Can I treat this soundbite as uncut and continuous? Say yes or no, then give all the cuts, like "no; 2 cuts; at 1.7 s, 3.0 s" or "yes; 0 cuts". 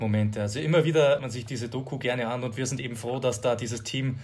no; 1 cut; at 1.2 s